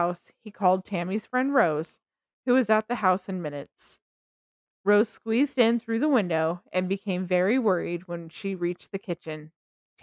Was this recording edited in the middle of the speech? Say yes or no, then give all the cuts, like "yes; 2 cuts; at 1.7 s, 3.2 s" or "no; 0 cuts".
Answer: no; 0 cuts